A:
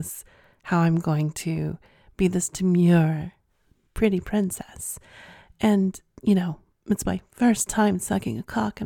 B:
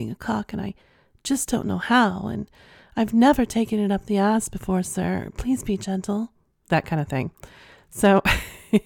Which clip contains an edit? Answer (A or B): A